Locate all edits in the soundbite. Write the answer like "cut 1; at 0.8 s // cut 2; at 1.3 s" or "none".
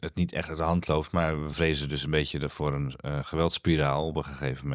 none